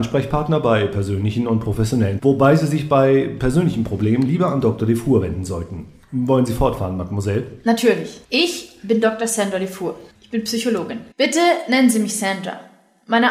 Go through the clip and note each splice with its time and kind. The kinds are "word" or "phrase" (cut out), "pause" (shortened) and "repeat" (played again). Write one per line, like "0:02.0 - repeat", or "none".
0:02.2 - word
0:08.2 - pause
0:10.1 - pause
0:11.1 - pause